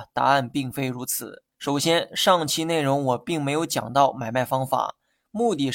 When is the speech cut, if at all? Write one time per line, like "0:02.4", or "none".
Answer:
0:01.5